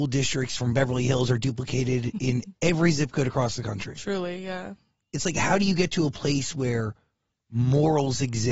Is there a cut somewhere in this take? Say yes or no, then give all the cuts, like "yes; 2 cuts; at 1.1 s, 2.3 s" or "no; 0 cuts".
no; 0 cuts